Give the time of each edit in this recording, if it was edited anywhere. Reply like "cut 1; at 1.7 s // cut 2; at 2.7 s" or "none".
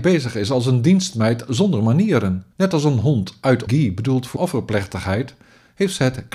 cut 1; at 2.5 s // cut 2; at 3.7 s // cut 3; at 4.4 s